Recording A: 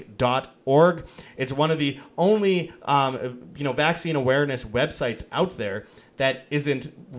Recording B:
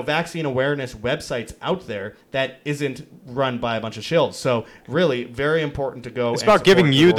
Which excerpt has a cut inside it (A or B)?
B